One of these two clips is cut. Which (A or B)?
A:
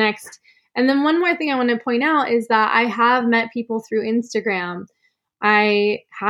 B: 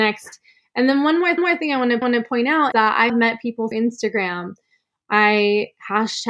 B